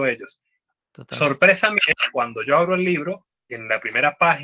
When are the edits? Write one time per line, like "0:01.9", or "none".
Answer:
none